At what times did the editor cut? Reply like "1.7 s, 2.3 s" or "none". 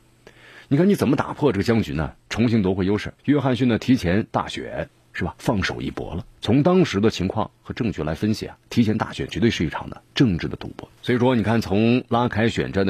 3.2 s, 4.3 s, 6.4 s, 8.6 s, 10.0 s, 11.0 s